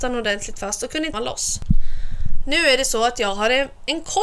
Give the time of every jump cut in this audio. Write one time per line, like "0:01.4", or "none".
0:01.1